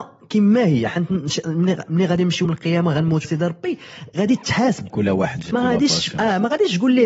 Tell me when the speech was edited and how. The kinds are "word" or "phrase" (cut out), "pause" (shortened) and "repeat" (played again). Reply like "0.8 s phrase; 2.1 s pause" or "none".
2.4 s word; 3.2 s word; 4.9 s word; 5.5 s word